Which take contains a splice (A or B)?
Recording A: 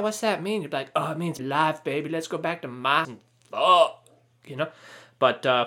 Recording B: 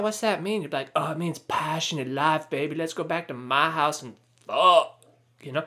A